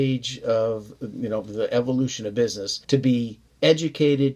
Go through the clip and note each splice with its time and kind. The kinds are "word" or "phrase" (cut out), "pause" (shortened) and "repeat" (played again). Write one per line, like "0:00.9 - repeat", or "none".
0:02.8 - pause